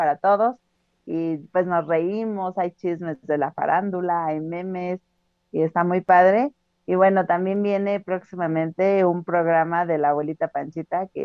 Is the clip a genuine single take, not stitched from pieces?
yes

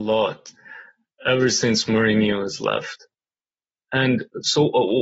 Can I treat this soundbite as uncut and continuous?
yes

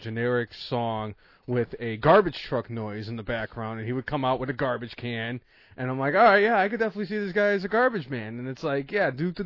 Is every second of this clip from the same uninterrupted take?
yes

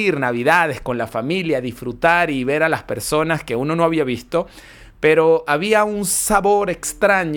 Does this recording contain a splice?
no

